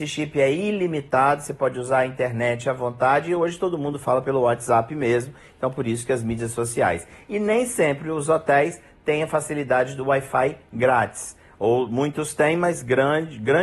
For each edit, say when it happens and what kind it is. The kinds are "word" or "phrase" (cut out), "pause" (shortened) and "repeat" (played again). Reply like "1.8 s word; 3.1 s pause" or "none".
none